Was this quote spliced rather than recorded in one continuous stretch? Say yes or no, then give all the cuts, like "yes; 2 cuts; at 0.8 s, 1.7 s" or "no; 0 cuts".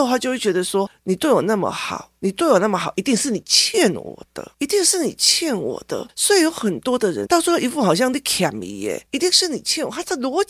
yes; 2 cuts; at 2.2 s, 7.3 s